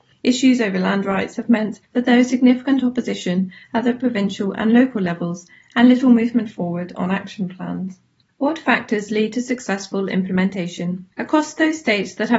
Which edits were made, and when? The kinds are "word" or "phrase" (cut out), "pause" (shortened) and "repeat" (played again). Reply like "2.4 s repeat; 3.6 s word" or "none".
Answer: 1.8 s pause; 8.3 s pause; 11.1 s pause